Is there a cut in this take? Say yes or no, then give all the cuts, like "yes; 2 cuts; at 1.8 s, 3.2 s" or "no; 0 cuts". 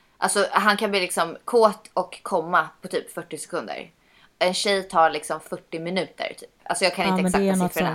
no; 0 cuts